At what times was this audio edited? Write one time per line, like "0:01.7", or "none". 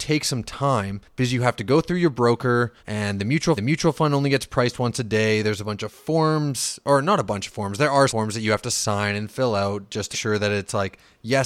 0:01.0
0:02.8
0:03.6
0:08.1
0:10.1